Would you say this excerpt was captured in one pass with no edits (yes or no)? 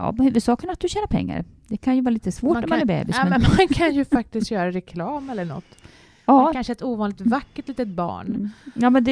yes